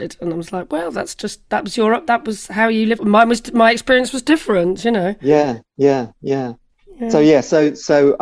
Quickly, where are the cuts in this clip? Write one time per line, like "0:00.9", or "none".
0:03.0